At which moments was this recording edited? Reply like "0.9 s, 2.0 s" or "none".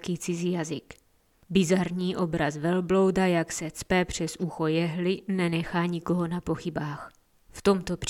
none